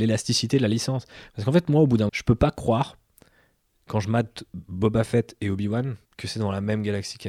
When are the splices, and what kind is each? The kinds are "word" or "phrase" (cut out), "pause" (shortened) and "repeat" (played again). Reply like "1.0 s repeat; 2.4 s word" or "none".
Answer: 2.1 s word; 6.1 s pause